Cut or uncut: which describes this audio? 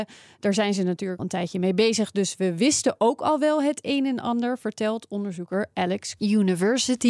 cut